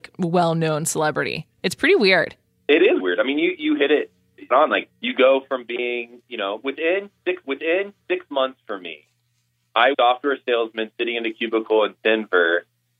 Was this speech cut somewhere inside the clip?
yes; 6 cuts; at 2.6 s, 3.0 s, 4.5 s, 4.9 s, 7.4 s, 9.9 s

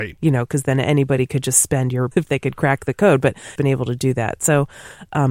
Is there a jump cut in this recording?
yes; 2 cuts; at 2.1 s, 3.6 s

